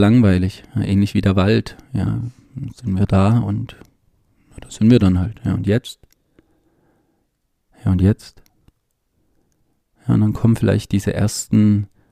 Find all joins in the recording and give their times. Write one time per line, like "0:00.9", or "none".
none